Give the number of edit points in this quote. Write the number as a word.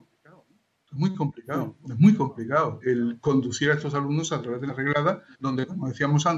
four